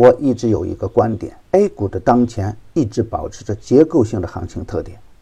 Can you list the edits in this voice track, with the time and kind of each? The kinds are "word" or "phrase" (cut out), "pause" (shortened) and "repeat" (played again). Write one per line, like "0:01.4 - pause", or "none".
0:01.4 - pause